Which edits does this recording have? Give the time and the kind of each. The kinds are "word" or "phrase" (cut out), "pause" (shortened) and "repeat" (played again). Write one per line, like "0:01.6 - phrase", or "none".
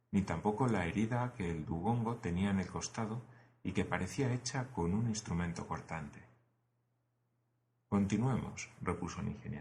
none